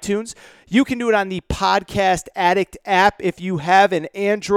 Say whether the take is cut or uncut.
uncut